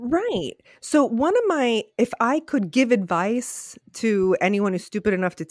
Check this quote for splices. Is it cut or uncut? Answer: uncut